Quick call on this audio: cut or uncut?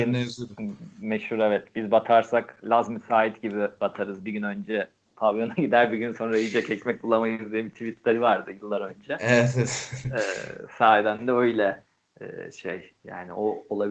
uncut